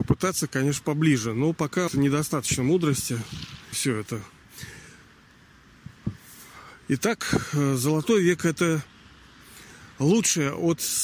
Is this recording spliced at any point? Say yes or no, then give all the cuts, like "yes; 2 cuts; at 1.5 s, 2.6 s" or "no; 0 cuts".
yes; 2 cuts; at 1.9 s, 3.7 s